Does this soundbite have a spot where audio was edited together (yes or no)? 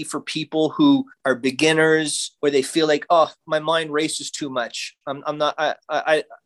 yes